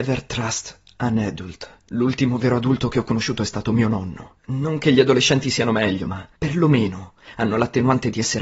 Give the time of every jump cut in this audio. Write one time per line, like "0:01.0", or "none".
0:01.8
0:04.4
0:06.4